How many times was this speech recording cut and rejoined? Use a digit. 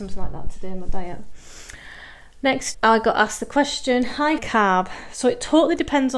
2